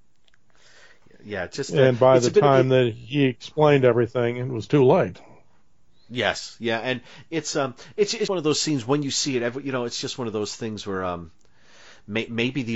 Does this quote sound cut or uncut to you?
cut